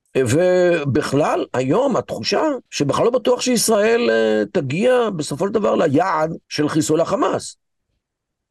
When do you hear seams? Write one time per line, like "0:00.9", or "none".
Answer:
0:02.7
0:06.4